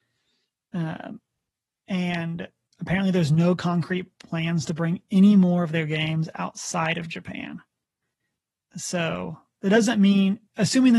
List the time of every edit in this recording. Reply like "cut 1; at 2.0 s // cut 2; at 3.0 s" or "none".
none